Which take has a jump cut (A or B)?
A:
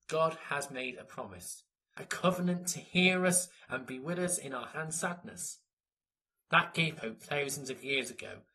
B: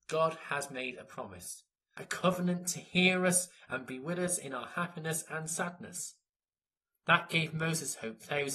A